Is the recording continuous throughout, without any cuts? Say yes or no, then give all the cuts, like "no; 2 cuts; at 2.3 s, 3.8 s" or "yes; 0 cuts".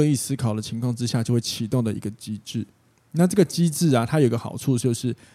yes; 0 cuts